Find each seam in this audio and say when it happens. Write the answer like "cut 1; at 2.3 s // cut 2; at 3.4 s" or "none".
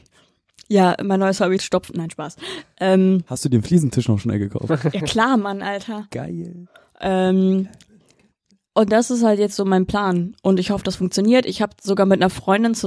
cut 1; at 1.6 s